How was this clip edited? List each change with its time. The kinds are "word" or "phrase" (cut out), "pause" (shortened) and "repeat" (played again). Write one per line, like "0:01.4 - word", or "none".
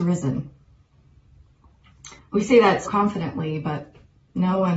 0:02.2 - pause
0:02.8 - word